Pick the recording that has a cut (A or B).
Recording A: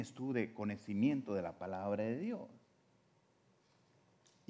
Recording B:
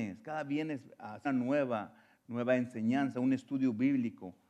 B